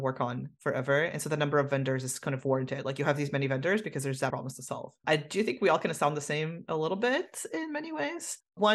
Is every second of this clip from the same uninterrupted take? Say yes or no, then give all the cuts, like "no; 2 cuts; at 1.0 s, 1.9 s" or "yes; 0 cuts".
no; 1 cut; at 4.3 s